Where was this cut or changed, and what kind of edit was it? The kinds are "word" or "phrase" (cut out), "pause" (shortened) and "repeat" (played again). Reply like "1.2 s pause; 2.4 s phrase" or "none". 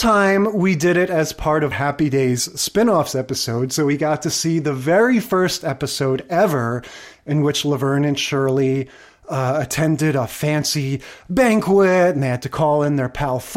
1.7 s word

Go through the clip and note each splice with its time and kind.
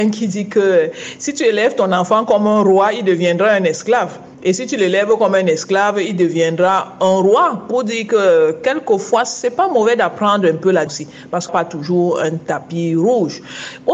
4.3 s pause; 10.9 s phrase; 11.5 s phrase

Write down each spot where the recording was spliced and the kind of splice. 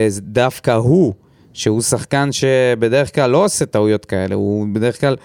none

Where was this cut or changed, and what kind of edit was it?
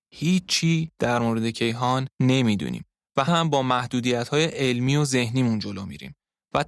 2.1 s pause; 3.3 s word

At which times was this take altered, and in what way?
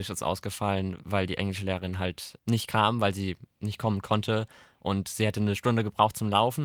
none

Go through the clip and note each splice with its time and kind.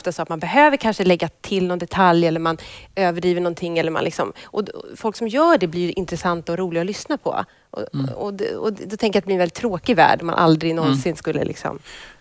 none

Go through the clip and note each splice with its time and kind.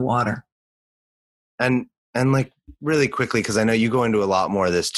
none

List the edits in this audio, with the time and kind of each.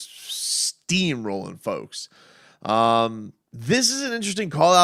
3.4 s pause

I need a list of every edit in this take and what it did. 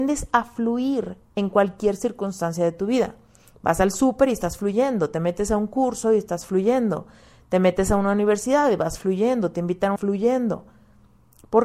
10.0 s phrase

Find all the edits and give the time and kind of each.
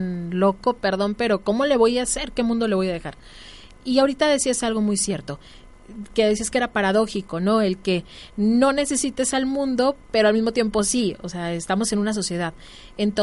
10.0 s pause

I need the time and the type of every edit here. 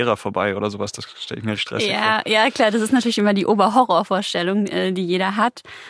1.6 s word

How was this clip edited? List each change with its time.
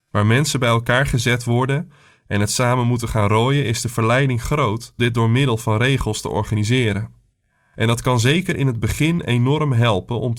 5.0 s word

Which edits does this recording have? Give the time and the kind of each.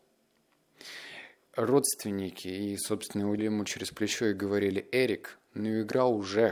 1.5 s word; 3.4 s phrase

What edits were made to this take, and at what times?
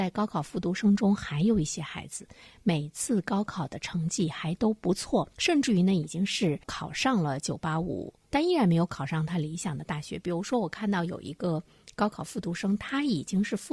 5.3 s pause; 6.6 s pause

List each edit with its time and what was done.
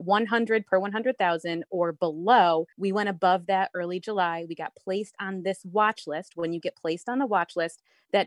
2.7 s pause

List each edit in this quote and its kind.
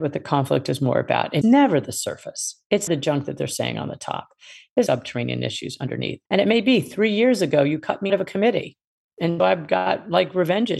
1.4 s word; 2.9 s word; 4.9 s word; 6.3 s pause; 8.1 s word; 9.4 s word

